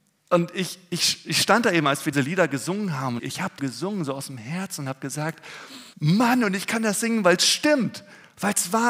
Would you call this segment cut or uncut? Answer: cut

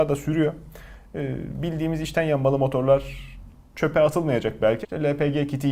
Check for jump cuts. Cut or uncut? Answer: cut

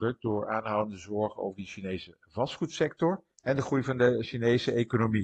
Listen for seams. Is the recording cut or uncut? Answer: cut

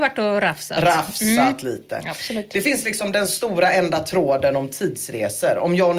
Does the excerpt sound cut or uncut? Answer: uncut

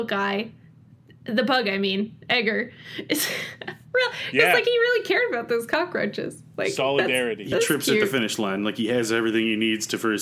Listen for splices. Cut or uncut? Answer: cut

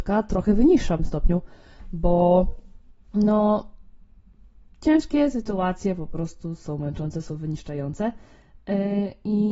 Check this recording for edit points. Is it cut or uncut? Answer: cut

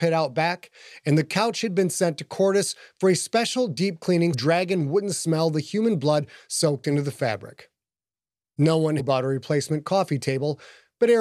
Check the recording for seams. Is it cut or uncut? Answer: cut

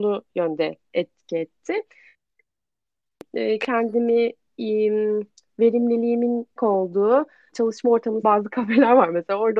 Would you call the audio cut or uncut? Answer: cut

